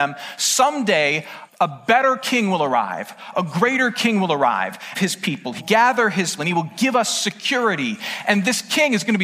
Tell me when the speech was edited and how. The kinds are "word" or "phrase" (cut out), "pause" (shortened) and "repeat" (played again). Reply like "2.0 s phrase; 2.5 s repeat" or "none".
1.5 s word; 4.9 s phrase; 5.6 s word; 6.4 s word